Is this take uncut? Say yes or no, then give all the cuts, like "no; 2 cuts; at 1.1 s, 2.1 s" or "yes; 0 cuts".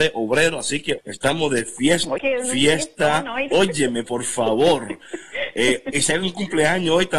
no; 5 cuts; at 1.0 s, 2.2 s, 3.5 s, 4.0 s, 5.9 s